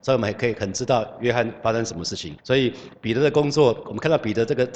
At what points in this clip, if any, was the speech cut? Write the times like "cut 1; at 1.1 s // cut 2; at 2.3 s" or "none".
cut 1; at 2.4 s